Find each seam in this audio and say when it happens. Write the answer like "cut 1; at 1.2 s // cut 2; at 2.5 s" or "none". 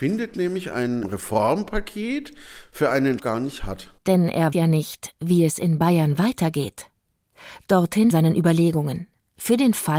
cut 1; at 3.2 s // cut 2; at 4.0 s // cut 3; at 4.5 s // cut 4; at 8.1 s